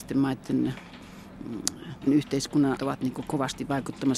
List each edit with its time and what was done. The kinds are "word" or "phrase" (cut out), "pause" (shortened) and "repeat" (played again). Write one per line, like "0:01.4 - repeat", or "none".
0:02.1 - word
0:02.8 - word